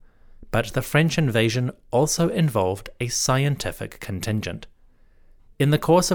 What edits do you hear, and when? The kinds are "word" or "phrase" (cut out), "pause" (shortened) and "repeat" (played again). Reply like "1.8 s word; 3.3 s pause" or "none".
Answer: none

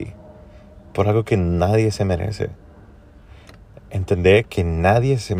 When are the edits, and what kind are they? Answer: none

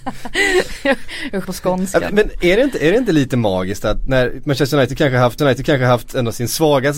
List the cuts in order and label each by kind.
1.4 s word; 2.1 s word; 5.4 s repeat

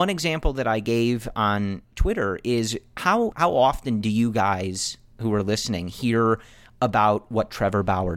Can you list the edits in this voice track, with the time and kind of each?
3.3 s word

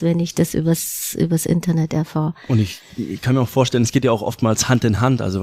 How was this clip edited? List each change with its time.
none

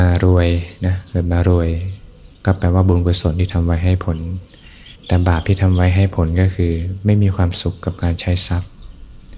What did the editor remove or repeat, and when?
2.3 s pause; 5.0 s pause

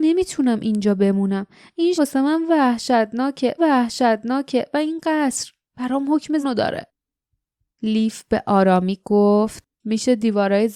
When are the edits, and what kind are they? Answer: 1.9 s word; 3.6 s repeat; 6.4 s word; 9.7 s pause

